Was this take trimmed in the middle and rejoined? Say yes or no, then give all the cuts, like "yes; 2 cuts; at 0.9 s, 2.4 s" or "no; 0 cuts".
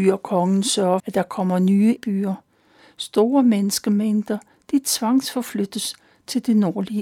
yes; 2 cuts; at 1.0 s, 2.0 s